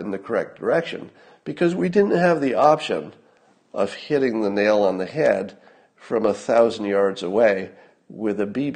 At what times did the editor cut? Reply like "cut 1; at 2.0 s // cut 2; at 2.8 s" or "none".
none